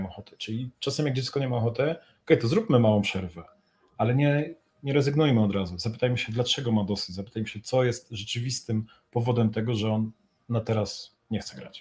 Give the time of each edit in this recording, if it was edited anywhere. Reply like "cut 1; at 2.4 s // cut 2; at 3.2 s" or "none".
none

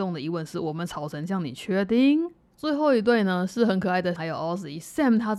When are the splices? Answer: cut 1; at 4.2 s

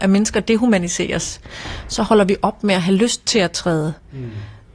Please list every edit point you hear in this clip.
none

